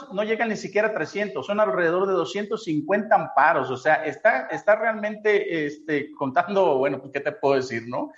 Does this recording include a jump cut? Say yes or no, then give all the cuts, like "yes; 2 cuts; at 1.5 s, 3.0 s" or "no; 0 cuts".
yes; 1 cut; at 4.5 s